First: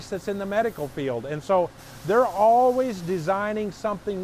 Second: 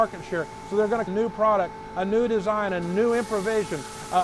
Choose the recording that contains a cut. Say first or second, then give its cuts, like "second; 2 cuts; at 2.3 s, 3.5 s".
second; 1 cut; at 1.1 s